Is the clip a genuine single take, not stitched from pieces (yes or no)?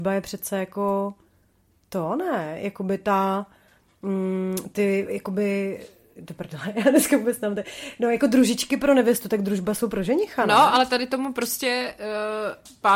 yes